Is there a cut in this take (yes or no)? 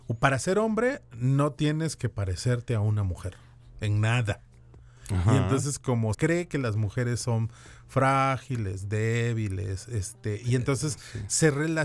yes